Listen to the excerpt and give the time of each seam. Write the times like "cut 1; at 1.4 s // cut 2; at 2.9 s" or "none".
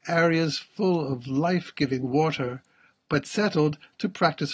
none